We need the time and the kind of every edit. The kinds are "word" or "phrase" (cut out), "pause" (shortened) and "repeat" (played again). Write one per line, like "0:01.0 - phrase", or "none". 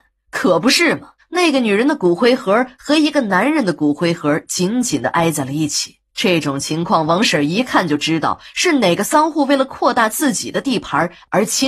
0:01.2 - pause
0:06.1 - pause